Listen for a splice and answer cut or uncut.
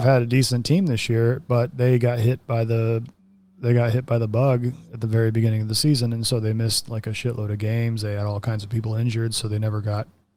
uncut